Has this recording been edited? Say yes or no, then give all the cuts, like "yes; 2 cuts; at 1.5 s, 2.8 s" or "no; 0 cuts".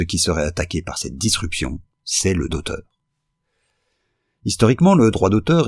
yes; 1 cut; at 2.5 s